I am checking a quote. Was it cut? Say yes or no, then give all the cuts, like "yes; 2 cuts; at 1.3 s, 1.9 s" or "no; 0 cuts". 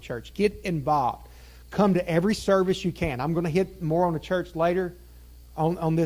no; 0 cuts